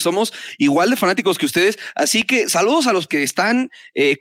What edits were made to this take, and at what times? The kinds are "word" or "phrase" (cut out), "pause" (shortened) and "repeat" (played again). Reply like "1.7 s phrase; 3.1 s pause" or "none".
3.1 s word